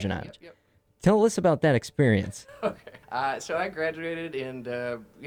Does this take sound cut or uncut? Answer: cut